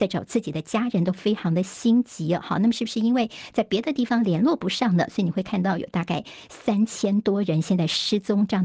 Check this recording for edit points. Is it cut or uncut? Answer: uncut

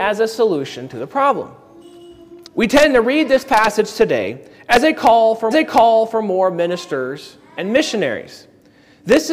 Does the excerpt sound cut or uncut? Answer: cut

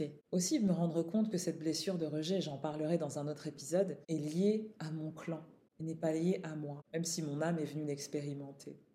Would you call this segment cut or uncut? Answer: uncut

